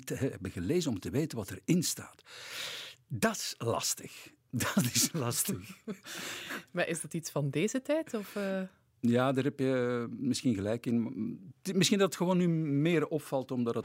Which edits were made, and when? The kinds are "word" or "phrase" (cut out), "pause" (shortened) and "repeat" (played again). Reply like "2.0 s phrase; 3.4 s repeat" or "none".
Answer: none

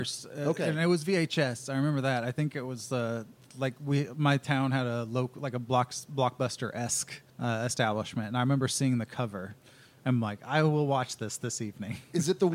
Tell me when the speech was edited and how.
7.3 s pause

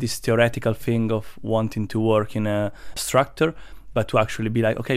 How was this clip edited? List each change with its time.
2.9 s phrase

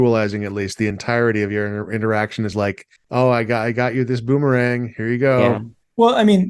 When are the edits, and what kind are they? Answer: none

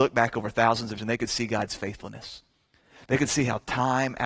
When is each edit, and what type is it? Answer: 1.0 s word

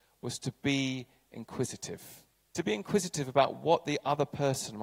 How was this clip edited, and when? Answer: 2.3 s pause

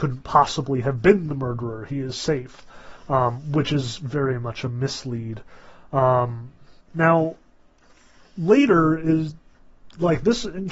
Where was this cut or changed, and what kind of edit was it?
6.8 s pause

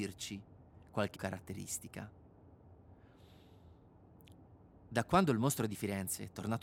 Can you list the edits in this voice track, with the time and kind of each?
1.1 s phrase

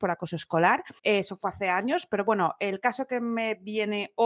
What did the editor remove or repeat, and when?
1.0 s pause

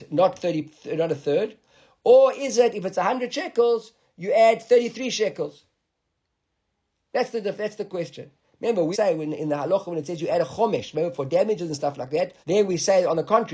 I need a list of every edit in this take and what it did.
8.9 s word; 12.4 s pause

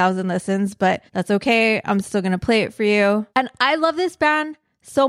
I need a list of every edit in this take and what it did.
1.1 s pause; 3.3 s pause

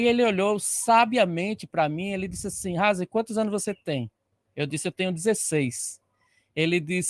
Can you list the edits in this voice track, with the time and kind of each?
none

